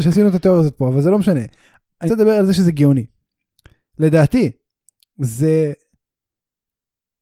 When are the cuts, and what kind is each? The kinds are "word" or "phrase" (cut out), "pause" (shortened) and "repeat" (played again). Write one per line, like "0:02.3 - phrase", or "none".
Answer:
0:02.1 - word